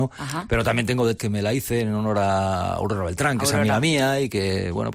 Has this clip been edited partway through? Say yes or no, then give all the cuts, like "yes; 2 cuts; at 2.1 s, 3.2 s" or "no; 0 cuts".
yes; 1 cut; at 1.2 s